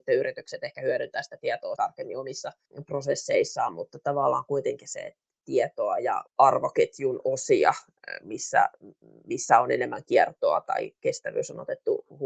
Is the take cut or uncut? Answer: cut